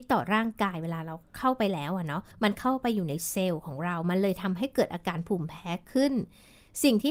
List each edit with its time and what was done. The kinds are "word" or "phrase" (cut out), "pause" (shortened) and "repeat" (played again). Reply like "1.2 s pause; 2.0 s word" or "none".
2.3 s pause